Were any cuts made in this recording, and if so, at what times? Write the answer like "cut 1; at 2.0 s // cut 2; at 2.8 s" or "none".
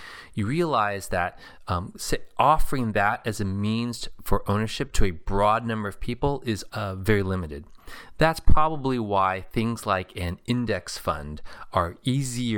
cut 1; at 6.7 s